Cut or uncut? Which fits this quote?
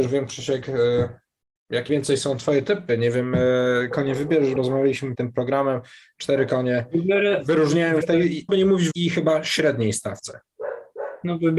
cut